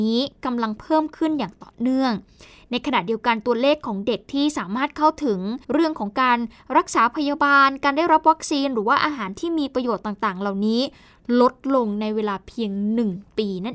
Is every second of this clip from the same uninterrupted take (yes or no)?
no